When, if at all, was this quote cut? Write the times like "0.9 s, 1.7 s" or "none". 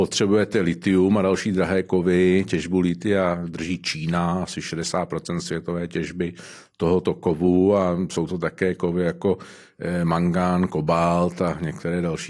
none